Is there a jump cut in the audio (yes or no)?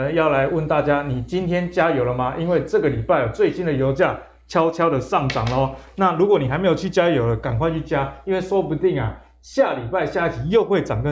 no